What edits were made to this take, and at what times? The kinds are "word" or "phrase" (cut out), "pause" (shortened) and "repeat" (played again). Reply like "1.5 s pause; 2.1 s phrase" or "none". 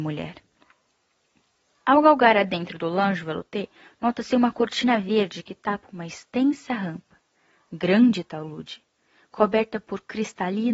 none